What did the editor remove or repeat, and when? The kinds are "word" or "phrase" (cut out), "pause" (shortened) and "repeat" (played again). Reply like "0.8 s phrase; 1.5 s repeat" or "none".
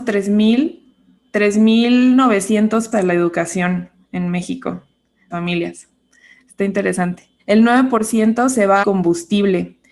2.9 s word; 5.3 s word; 7.4 s pause; 8.8 s phrase